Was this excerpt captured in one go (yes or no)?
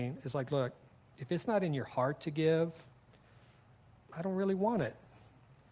yes